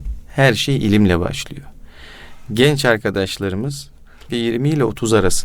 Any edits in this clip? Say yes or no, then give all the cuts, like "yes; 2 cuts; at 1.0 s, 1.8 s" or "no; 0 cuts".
yes; 1 cut; at 4.3 s